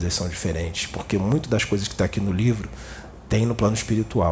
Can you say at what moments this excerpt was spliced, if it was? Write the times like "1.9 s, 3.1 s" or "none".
none